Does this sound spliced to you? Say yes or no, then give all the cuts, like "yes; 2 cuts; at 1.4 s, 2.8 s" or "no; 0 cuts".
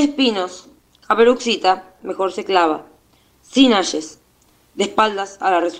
yes; 1 cut; at 2.0 s